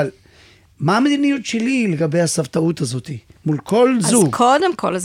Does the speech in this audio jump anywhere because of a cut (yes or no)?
no